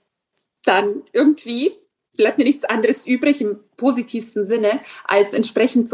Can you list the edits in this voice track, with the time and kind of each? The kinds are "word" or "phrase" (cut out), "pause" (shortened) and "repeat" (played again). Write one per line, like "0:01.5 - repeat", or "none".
none

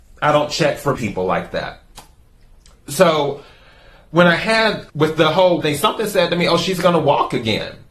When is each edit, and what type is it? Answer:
0:01.0 - word
0:04.9 - word
0:05.6 - word

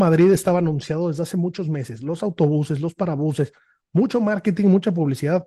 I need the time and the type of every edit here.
none

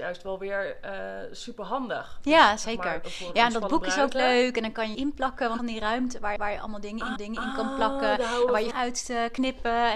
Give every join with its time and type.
0:04.9 - phrase
0:05.6 - phrase
0:06.4 - repeat
0:07.2 - repeat
0:08.7 - phrase

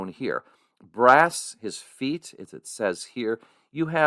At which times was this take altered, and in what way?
none

